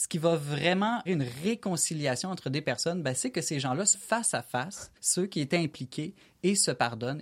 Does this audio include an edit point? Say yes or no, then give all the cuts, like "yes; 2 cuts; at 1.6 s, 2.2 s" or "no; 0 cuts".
yes; 3 cuts; at 1.1 s, 3.9 s, 5.0 s